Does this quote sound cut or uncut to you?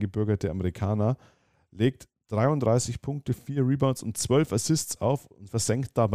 uncut